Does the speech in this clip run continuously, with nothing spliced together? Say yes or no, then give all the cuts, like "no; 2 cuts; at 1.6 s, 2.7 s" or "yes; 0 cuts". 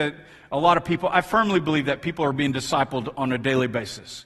yes; 0 cuts